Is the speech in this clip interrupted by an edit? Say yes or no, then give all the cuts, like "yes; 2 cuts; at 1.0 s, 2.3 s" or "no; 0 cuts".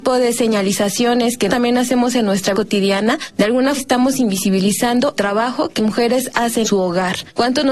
yes; 6 cuts; at 1.5 s, 2.5 s, 3.8 s, 5.2 s, 5.8 s, 6.6 s